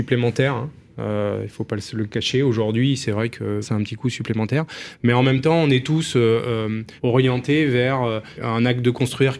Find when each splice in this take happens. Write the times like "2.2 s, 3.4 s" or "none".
3.6 s, 7.0 s, 8.4 s